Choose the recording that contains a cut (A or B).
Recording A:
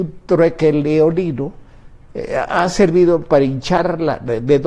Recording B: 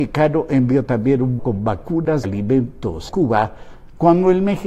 B